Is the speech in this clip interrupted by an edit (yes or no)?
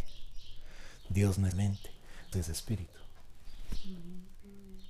yes